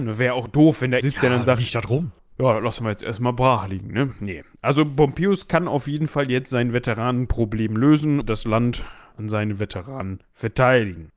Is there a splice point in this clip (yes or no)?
yes